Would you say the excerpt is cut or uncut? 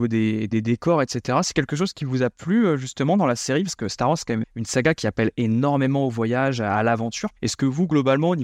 cut